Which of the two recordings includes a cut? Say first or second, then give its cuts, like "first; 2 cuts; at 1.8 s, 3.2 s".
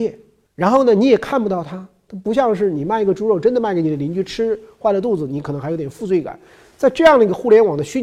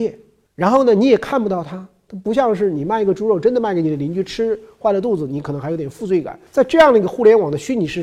second; 1 cut; at 6.5 s